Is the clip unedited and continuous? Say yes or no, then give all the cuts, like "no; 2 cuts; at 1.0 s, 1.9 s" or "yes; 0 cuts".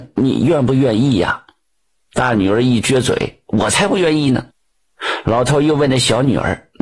no; 1 cut; at 4.5 s